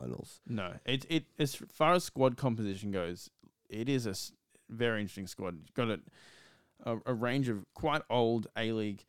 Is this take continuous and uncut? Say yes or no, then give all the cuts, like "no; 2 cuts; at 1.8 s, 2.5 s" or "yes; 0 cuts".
yes; 0 cuts